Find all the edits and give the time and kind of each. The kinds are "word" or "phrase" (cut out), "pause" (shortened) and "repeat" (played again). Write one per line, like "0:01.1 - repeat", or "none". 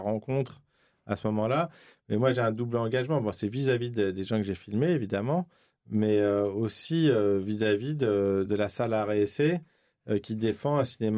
0:08.5 - word